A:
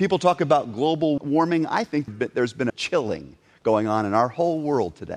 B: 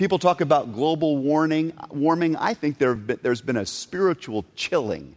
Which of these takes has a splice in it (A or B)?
A